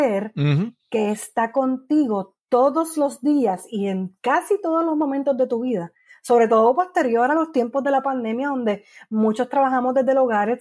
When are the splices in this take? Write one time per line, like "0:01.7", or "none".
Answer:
none